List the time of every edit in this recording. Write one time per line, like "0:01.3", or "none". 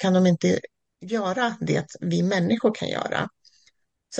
0:02.0

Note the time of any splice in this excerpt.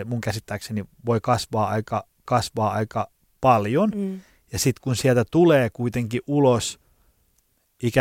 0:02.3

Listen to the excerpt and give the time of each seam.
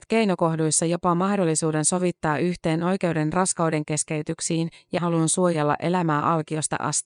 0:05.0

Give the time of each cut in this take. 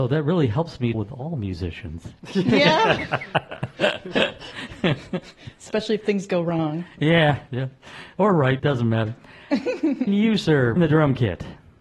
0:00.9
0:07.5
0:08.6
0:10.1
0:10.8

